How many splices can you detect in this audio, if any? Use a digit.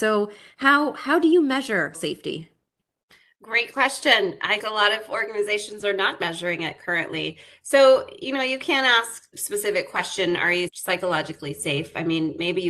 4